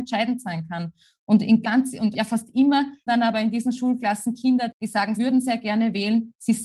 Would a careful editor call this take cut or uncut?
cut